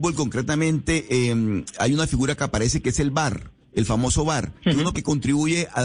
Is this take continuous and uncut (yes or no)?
no